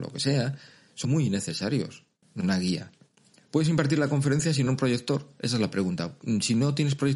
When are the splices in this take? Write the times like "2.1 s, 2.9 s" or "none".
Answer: 1.0 s, 2.4 s, 4.7 s